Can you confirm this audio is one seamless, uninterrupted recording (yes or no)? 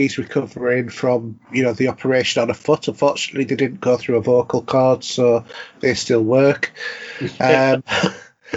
yes